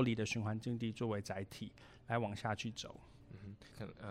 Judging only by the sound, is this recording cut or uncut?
uncut